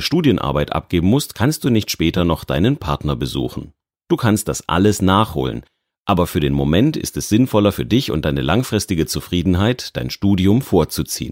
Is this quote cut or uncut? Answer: uncut